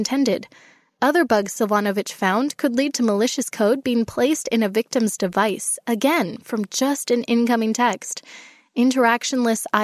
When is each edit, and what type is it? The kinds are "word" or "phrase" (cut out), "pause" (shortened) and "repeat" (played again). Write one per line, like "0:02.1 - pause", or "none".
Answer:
none

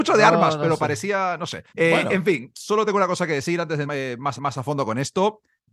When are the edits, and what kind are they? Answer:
0:01.7 - pause
0:02.5 - word
0:03.9 - word
0:04.4 - repeat

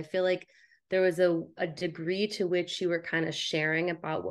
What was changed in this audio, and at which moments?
none

